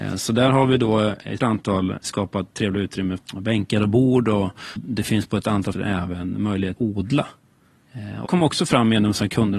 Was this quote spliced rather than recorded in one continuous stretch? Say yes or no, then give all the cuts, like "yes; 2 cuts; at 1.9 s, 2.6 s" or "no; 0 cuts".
yes; 7 cuts; at 1.4 s, 2.0 s, 3.2 s, 4.8 s, 5.7 s, 6.8 s, 8.3 s